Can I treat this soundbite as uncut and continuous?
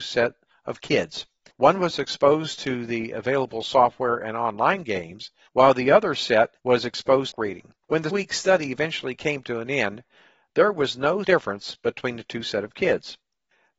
no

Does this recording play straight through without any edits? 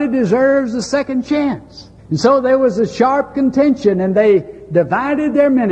no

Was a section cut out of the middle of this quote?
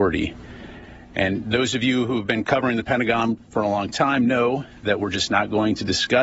no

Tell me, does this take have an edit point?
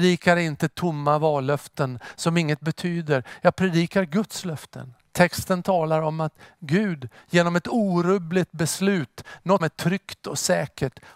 yes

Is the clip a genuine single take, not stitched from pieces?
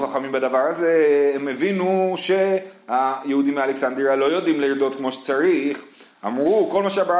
yes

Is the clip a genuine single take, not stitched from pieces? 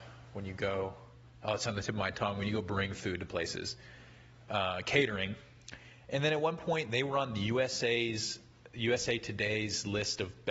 yes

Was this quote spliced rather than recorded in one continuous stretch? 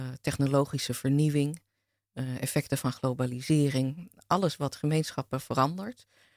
no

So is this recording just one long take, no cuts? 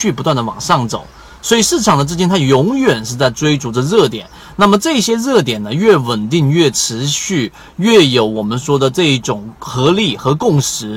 yes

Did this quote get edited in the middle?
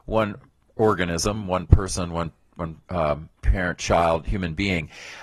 yes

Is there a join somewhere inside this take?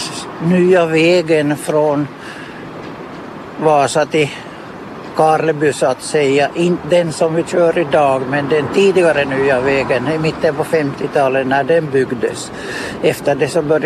no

